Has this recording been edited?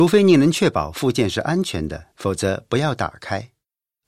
yes; 1 cut; at 2.1 s

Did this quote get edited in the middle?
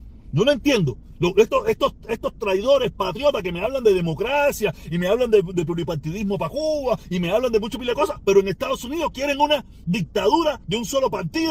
no; 0 cuts

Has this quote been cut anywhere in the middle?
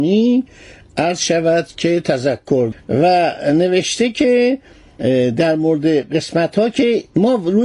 yes; 1 cut; at 2.7 s

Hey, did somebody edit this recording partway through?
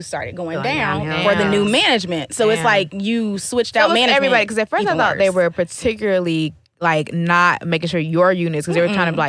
no; 0 cuts

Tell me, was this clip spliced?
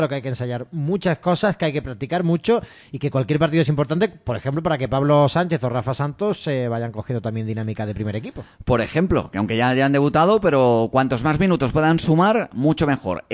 no; 0 cuts

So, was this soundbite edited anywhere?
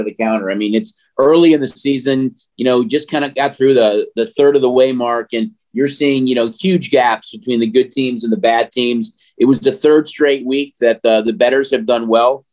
no; 0 cuts

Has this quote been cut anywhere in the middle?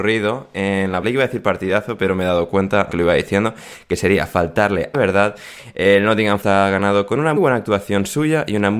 yes; 5 cuts; at 1.0 s, 2.9 s, 4.9 s, 6.4 s, 7.4 s

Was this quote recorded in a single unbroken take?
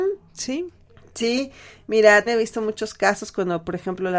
no; 1 cut; at 2.3 s

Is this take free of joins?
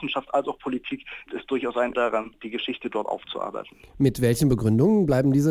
no; 2 cuts; at 1.3 s, 1.9 s

